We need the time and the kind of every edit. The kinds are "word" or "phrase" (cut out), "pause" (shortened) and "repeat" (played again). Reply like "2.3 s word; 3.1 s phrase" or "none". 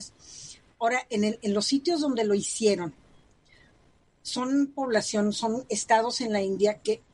none

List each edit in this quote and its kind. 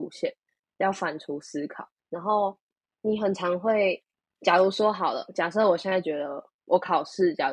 2.0 s pause; 4.1 s pause

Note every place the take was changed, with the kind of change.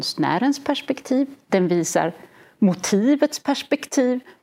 none

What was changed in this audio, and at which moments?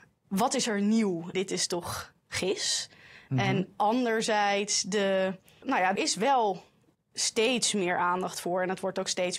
1.3 s word; 5.6 s word; 6.0 s word

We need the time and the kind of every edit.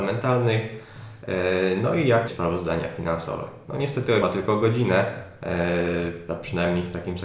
2.3 s word; 4.2 s word

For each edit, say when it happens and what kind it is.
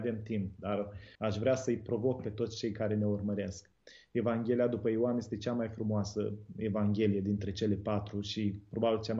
1.1 s pause

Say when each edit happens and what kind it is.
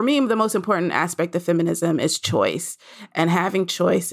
none

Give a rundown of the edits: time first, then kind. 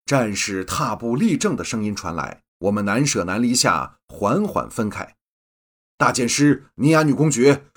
2.5 s pause

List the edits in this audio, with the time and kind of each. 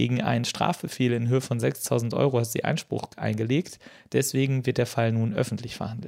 none

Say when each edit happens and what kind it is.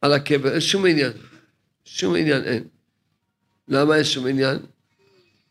none

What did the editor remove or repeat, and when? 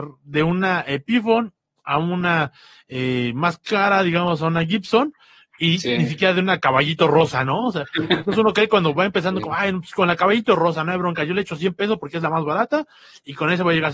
none

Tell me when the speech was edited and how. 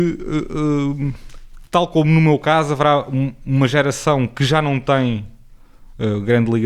none

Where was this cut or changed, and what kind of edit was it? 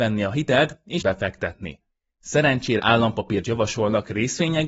1.0 s word; 2.8 s word; 3.4 s word

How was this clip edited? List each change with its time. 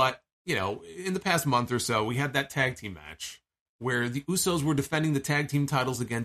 3.6 s pause

